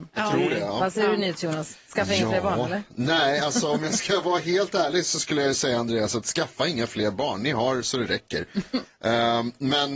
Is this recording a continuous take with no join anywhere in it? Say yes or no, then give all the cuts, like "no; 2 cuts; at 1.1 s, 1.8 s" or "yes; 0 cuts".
yes; 0 cuts